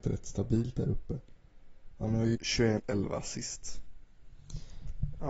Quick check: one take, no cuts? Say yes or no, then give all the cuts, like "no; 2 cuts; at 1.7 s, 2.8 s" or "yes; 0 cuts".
no; 2 cuts; at 2.3 s, 2.8 s